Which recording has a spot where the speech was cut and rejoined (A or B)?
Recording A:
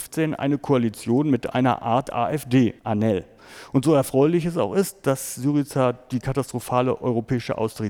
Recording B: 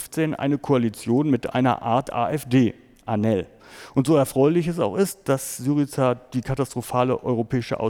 A